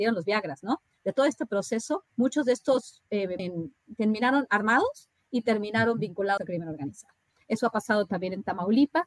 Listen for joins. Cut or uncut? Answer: cut